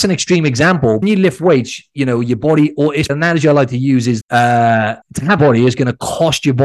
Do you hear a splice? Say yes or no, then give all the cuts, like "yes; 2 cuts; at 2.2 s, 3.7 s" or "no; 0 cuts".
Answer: yes; 5 cuts; at 1.0 s, 3.1 s, 4.2 s, 5.0 s, 5.4 s